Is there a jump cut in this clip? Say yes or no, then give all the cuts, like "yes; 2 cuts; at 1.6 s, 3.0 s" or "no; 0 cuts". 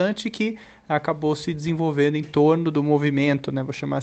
no; 0 cuts